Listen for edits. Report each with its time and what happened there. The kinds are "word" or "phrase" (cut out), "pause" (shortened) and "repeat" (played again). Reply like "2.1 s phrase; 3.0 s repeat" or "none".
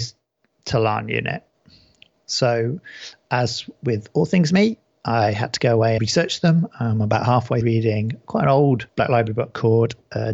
6.0 s word; 7.6 s word